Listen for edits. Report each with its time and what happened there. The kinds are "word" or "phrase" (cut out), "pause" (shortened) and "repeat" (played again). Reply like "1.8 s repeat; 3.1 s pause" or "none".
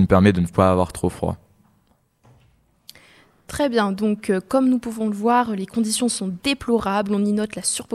none